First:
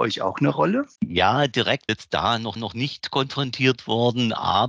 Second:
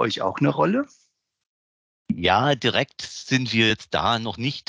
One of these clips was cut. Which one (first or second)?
first